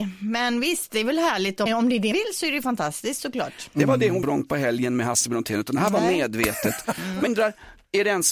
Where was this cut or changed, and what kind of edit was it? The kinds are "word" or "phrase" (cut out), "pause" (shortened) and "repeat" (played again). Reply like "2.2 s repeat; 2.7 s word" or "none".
1.7 s word; 2.1 s word; 4.2 s phrase; 7.3 s word